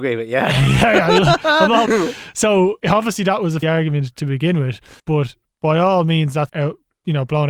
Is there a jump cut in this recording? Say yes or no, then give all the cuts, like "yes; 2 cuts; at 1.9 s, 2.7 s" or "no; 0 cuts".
yes; 5 cuts; at 1.9 s, 2.8 s, 3.6 s, 5.0 s, 6.5 s